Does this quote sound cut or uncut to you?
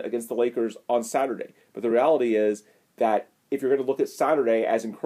uncut